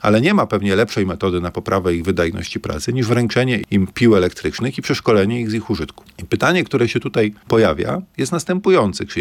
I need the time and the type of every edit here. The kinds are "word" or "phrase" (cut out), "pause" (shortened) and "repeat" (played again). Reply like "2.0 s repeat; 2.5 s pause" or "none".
none